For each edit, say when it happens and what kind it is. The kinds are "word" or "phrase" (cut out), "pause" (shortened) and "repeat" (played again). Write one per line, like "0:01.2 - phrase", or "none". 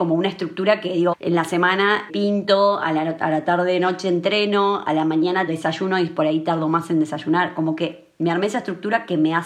0:01.1 - word
0:02.1 - word
0:05.5 - word